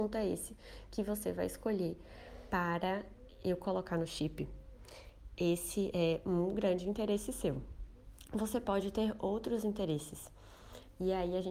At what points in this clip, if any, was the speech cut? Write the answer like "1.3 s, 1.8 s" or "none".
none